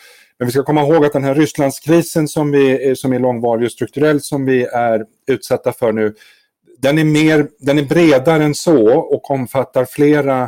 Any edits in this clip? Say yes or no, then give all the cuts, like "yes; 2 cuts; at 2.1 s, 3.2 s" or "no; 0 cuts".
no; 0 cuts